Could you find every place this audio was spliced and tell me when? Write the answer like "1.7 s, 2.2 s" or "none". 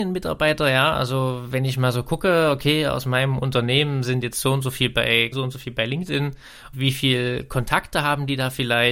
5.3 s, 6.7 s